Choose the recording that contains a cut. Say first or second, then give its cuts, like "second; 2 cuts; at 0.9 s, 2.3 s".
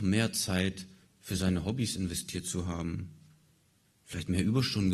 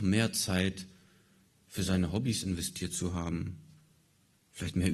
first; 1 cut; at 1.0 s